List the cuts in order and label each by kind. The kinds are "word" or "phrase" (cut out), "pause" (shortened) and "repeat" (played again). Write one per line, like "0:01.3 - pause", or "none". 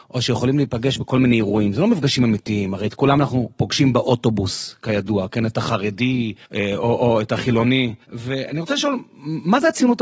0:06.4 - pause
0:08.0 - pause